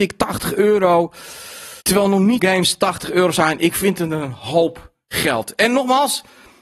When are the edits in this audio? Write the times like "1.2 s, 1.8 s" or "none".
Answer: 1.8 s, 2.4 s